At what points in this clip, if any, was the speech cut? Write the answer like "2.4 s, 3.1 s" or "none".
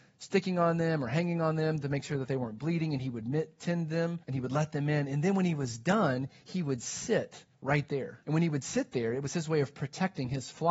4.2 s, 7.5 s, 8.2 s